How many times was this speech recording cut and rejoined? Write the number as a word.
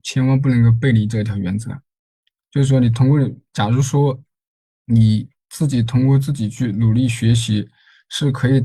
zero